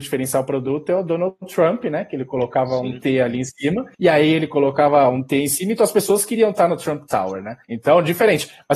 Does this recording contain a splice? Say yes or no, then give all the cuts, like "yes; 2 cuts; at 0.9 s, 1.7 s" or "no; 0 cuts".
yes; 2 cuts; at 3.9 s, 7.6 s